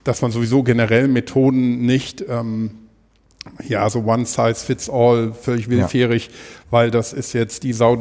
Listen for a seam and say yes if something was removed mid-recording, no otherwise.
no